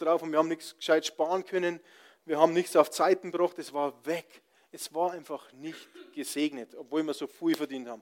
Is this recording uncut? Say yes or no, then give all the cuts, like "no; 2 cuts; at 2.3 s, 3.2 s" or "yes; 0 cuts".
yes; 0 cuts